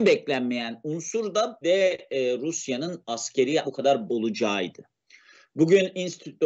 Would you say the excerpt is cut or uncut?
cut